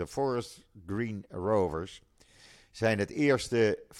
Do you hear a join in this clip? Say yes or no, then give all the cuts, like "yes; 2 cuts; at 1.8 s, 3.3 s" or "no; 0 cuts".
no; 0 cuts